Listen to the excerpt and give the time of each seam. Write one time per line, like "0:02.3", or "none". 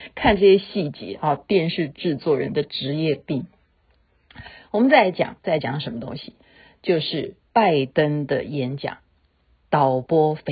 0:05.4
0:07.5

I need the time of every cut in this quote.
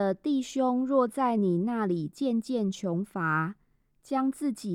none

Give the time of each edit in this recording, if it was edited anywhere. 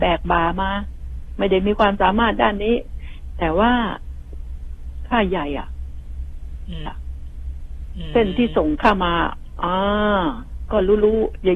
0:06.9

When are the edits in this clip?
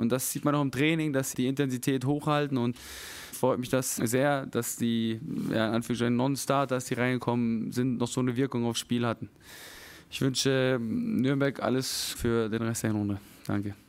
0:01.3
0:03.3
0:04.0
0:12.1

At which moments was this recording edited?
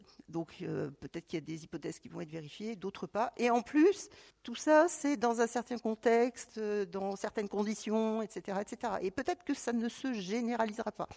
0:04.3
0:09.6

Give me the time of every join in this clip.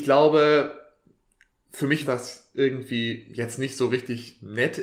0:02.0

